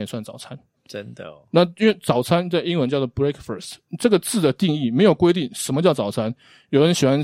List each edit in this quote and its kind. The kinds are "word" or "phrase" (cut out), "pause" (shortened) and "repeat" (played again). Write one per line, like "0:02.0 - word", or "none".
none

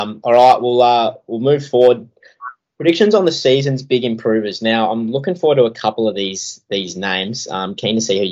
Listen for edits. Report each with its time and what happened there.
none

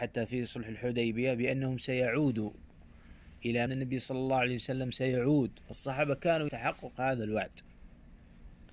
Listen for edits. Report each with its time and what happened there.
0:03.7 - phrase
0:06.5 - word

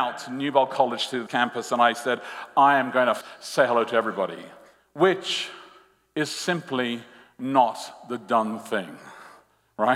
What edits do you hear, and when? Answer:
0:01.3 - word
0:03.2 - word

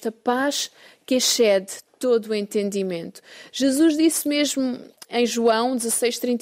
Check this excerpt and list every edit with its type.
none

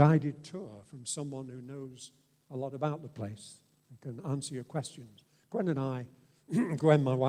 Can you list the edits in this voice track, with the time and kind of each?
none

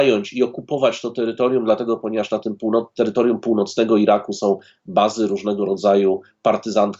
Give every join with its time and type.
none

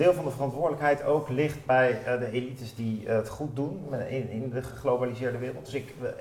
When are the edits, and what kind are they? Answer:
none

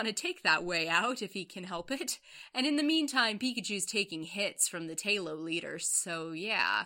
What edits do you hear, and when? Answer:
none

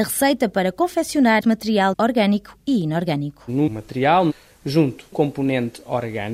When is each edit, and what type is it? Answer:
0:01.4 - word
0:01.9 - word
0:03.7 - word
0:05.1 - word

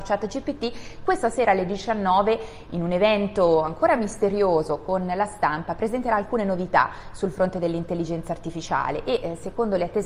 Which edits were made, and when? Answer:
none

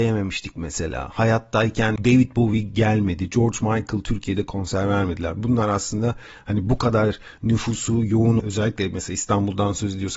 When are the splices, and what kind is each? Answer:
0:02.0 - word
0:08.4 - word

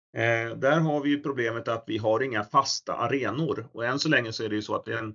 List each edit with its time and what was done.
none

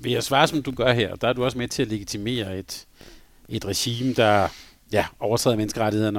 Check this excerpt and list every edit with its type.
none

